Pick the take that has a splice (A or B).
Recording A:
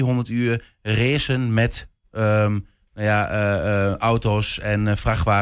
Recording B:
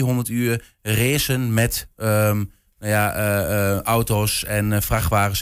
B